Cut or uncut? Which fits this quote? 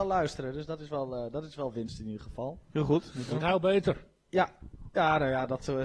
cut